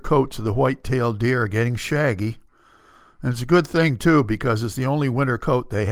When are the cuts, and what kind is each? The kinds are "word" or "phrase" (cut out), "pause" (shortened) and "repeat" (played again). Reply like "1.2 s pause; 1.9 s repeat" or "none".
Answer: none